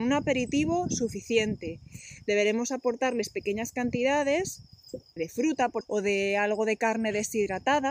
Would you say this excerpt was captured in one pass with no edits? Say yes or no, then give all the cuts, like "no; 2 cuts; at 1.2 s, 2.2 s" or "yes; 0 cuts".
no; 2 cuts; at 5.2 s, 5.8 s